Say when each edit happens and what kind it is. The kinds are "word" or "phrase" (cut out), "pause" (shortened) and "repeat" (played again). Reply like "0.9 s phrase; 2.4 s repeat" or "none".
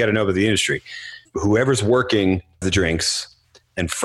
1.3 s pause; 2.6 s word